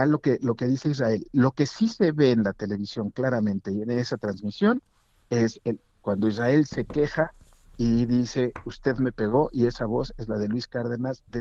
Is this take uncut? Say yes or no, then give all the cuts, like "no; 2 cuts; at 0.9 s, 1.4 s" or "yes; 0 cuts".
yes; 0 cuts